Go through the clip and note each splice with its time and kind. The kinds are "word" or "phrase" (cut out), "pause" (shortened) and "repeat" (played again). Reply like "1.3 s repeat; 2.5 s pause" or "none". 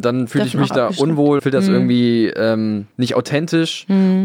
1.4 s word; 2.9 s pause